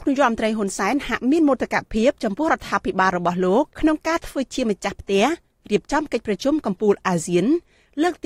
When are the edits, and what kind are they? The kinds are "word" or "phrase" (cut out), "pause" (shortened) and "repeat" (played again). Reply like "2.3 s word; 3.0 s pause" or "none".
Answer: 3.7 s pause